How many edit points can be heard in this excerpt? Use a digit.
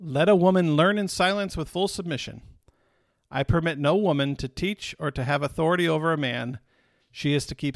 0